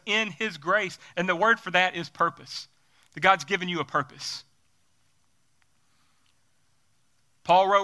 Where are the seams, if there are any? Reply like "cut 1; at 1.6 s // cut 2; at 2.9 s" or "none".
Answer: none